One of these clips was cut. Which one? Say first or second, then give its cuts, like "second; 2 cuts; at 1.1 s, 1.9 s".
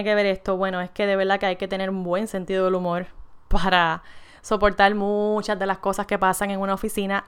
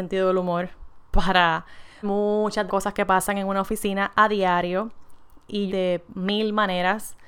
second; 3 cuts; at 2.0 s, 2.7 s, 5.7 s